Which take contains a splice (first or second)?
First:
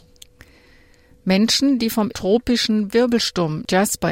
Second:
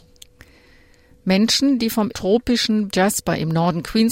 second